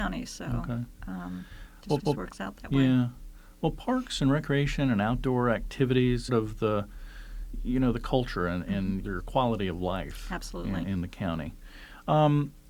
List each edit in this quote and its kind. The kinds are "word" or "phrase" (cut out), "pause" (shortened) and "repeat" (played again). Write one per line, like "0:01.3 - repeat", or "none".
0:02.0 - repeat
0:06.3 - phrase
0:09.0 - word